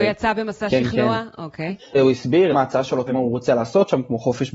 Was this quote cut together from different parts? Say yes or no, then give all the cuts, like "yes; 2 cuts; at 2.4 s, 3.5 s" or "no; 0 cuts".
yes; 3 cuts; at 1.8 s, 2.5 s, 3.1 s